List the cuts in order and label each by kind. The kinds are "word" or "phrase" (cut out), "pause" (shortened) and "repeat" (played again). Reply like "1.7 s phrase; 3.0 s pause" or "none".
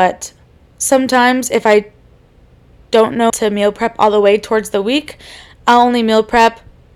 3.3 s word